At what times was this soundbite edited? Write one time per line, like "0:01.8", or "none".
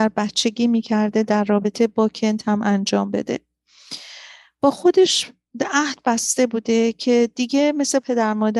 none